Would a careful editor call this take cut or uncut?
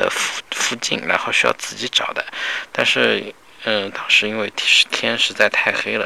uncut